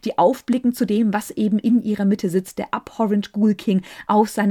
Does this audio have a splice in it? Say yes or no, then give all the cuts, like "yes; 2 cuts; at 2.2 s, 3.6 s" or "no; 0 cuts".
no; 0 cuts